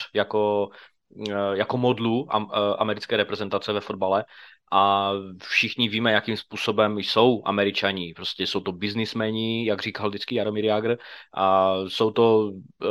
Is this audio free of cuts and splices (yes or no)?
yes